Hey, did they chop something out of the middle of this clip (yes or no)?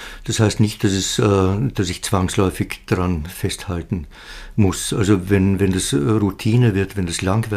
no